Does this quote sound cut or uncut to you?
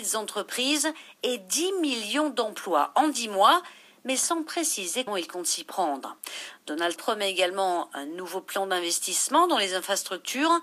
cut